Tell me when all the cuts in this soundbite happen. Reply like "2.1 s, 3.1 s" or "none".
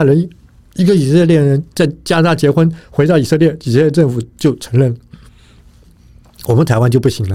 none